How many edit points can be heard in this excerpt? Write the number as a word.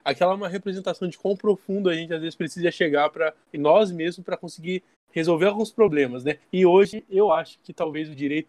three